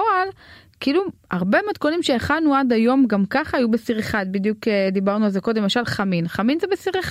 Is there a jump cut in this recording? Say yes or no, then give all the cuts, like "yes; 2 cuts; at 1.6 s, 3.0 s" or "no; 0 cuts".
no; 0 cuts